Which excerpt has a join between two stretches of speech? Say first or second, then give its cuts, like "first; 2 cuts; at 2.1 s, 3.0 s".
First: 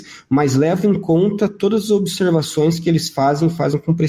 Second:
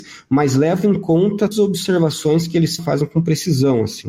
second; 2 cuts; at 1.5 s, 2.8 s